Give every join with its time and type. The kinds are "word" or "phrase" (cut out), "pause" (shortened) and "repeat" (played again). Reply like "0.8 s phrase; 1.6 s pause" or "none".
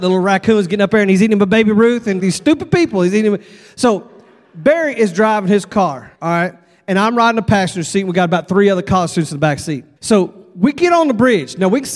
2.2 s word; 6.1 s pause; 10.0 s pause